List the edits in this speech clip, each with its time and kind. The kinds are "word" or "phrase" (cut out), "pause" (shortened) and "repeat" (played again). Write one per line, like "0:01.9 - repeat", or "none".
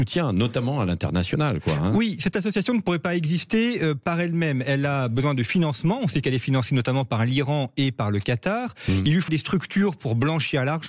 0:09.3 - word